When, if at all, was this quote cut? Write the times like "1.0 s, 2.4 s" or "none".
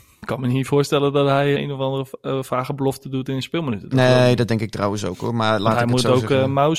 1.6 s